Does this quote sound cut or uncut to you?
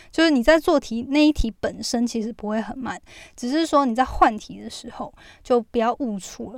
uncut